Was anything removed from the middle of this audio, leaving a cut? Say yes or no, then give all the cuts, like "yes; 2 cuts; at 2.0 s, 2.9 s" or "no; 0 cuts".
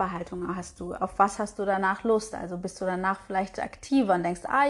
no; 0 cuts